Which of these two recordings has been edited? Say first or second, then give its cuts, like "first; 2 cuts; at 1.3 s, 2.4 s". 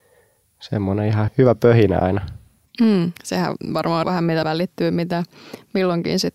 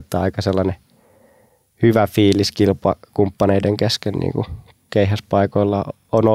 first; 4 cuts; at 1.3 s, 2.7 s, 4.0 s, 4.4 s